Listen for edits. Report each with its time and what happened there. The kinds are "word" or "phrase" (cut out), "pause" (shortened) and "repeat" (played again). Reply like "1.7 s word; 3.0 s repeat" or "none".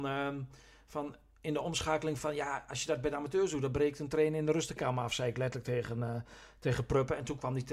4.8 s word